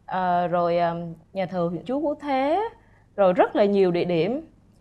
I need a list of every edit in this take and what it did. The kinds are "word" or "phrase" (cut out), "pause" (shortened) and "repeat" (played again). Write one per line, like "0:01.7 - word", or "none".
0:01.2 - pause
0:01.8 - phrase